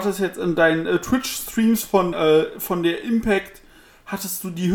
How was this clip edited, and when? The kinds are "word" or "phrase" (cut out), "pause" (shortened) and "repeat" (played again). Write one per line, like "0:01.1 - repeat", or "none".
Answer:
0:02.1 - word